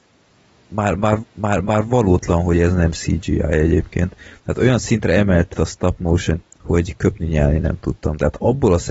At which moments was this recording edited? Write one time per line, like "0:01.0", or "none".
0:01.2
0:05.5
0:06.4